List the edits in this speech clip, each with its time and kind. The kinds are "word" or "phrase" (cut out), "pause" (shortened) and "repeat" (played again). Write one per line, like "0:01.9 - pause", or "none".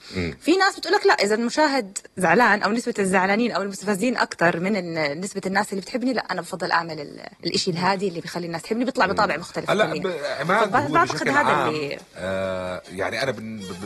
0:02.1 - pause
0:07.3 - pause